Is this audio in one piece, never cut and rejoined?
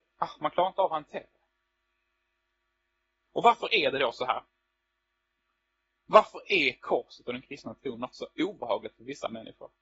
yes; 0 cuts

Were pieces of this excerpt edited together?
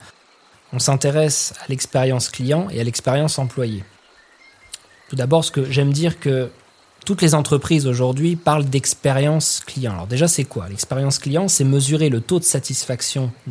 no; 0 cuts

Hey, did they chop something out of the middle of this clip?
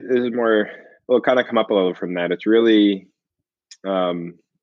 no; 0 cuts

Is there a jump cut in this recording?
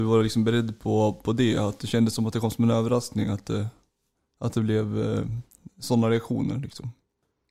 no; 0 cuts

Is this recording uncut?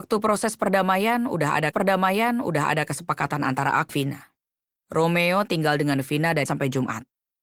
no; 3 cuts; at 1.7 s, 3.9 s, 6.5 s

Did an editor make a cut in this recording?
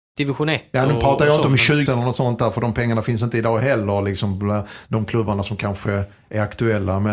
yes; 1 cut; at 1.9 s

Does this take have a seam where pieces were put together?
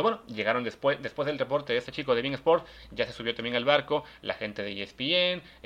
no; 0 cuts

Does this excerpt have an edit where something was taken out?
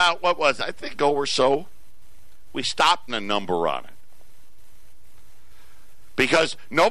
yes; 2 cuts; at 0.9 s, 3.1 s

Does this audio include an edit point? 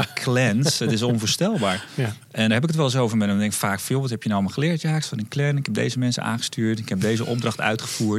no; 0 cuts

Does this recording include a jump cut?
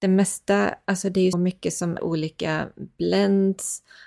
yes; 2 cuts; at 1.3 s, 2.0 s

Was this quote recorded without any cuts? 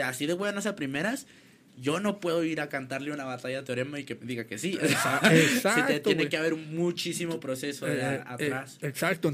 yes; 0 cuts

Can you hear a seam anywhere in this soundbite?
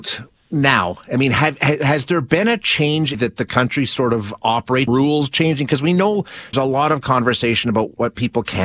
yes; 3 cuts; at 3.1 s, 4.9 s, 6.5 s

